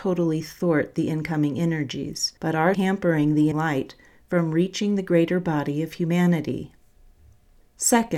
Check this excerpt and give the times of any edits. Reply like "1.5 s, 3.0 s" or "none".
2.4 s, 2.7 s, 3.5 s